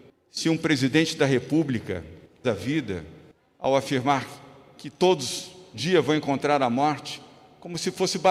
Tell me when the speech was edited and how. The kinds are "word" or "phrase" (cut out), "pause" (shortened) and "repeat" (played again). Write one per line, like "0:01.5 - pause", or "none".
0:02.4 - word
0:05.7 - word